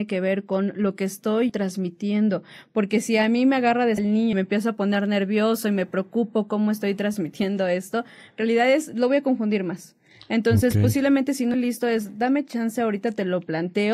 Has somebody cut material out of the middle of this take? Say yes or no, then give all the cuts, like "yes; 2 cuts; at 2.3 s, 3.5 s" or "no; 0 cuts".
yes; 4 cuts; at 1.5 s, 4.0 s, 4.3 s, 11.5 s